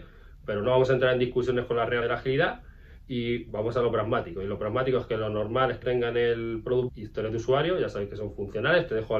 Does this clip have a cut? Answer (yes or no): yes